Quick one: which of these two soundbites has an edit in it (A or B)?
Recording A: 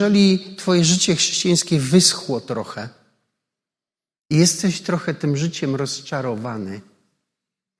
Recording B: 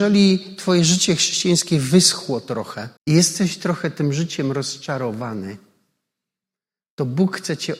B